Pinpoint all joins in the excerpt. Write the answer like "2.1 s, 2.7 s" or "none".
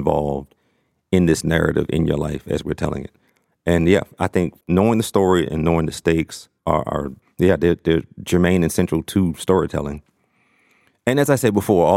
4.6 s, 6.6 s, 7.2 s